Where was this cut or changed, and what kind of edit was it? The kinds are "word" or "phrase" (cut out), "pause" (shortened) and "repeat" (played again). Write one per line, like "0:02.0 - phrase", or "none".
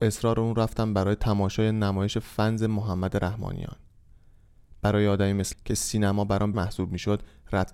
0:05.5 - word
0:06.5 - phrase